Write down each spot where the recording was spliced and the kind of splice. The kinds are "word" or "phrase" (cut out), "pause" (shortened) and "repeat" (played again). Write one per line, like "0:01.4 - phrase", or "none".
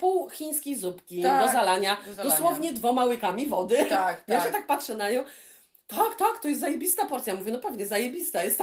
none